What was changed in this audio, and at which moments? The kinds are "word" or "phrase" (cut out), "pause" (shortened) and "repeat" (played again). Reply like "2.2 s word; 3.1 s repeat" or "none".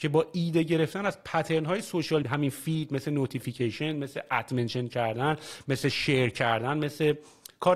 2.2 s phrase